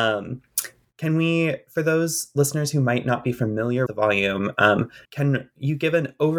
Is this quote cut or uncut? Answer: cut